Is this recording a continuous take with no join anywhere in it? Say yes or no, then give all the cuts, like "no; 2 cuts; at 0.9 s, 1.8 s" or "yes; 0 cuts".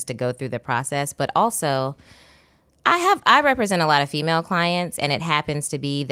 yes; 0 cuts